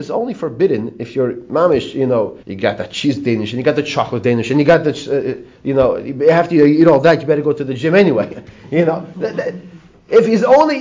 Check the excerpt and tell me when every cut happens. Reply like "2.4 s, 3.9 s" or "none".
2.4 s